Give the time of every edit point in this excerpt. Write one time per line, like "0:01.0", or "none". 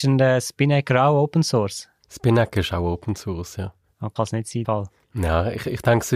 0:04.2
0:04.6